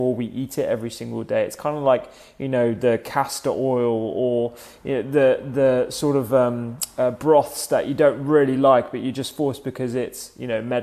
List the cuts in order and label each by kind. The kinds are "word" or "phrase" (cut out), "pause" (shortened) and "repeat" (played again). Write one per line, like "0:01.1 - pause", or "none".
none